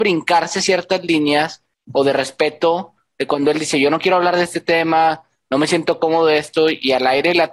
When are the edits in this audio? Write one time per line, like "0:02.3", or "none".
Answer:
none